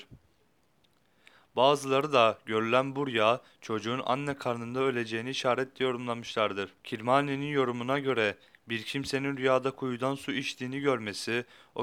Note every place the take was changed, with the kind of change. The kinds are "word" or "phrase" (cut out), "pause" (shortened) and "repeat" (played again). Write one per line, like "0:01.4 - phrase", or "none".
0:06.8 - pause